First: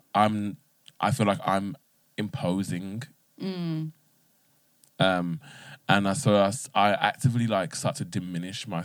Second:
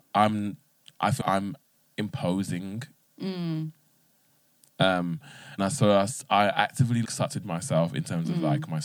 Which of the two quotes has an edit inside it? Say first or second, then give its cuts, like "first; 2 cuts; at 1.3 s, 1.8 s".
second; 4 cuts; at 1.2 s, 5.6 s, 7.0 s, 7.4 s